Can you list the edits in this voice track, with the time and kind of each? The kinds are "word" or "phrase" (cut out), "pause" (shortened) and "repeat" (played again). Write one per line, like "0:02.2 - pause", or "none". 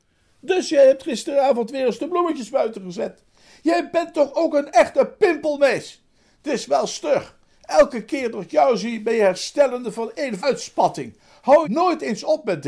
0:10.4 - word
0:11.6 - word